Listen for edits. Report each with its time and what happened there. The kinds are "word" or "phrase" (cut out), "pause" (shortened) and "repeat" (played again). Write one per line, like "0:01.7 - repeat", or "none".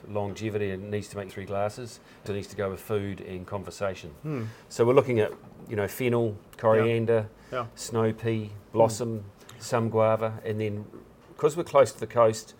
0:01.3 - phrase
0:02.3 - phrase
0:06.5 - pause